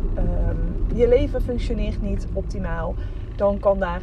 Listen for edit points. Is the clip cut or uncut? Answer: uncut